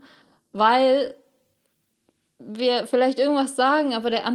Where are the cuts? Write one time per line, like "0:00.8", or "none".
none